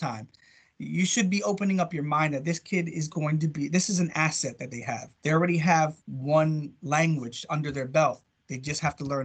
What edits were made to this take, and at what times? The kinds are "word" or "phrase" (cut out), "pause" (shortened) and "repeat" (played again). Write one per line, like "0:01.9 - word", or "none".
0:05.2 - pause
0:06.0 - pause